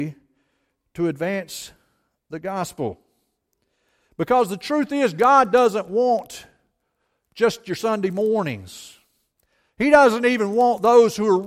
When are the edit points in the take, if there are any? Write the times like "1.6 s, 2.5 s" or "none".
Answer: none